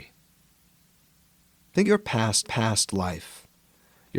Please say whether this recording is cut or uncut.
cut